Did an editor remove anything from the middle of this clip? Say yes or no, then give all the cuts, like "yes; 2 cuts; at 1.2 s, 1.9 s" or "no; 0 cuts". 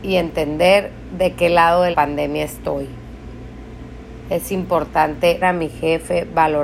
yes; 2 cuts; at 1.9 s, 5.4 s